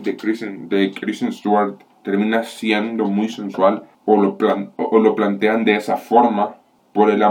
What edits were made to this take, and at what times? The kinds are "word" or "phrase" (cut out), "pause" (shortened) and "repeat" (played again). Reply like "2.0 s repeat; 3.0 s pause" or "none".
1.9 s pause